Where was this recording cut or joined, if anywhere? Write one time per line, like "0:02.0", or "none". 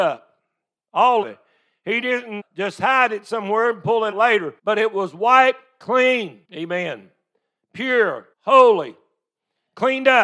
0:01.2
0:02.4
0:04.1
0:04.6
0:06.4
0:08.3